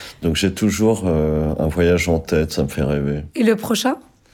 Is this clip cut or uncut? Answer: uncut